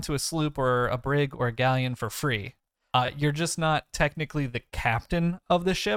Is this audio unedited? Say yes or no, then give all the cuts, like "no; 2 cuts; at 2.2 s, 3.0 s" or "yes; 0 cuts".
yes; 0 cuts